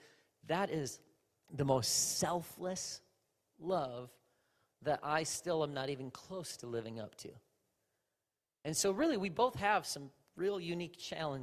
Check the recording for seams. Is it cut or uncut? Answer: uncut